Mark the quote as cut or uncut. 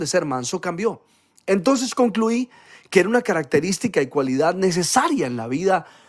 uncut